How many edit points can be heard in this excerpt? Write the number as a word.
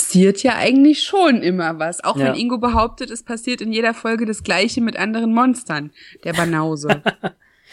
zero